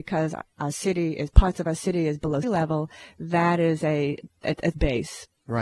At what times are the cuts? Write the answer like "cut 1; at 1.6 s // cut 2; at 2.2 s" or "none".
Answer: cut 1; at 2.4 s // cut 2; at 4.7 s